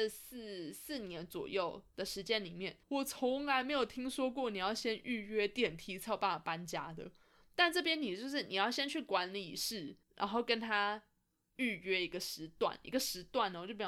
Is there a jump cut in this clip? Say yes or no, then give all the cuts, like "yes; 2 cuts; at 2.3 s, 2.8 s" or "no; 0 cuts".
yes; 2 cuts; at 2.8 s, 10.0 s